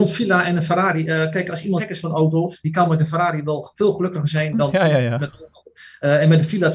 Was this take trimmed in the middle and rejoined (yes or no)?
yes